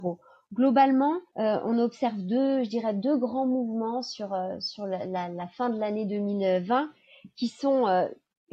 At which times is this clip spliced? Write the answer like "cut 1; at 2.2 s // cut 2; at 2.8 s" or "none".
cut 1; at 1.3 s